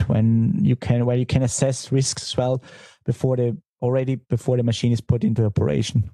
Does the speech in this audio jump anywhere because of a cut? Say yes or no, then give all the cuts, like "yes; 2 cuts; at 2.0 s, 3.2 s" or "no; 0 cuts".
no; 0 cuts